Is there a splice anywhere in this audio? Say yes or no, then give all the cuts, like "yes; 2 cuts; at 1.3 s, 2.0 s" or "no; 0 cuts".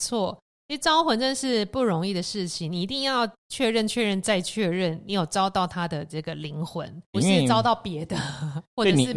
yes; 1 cut; at 7.1 s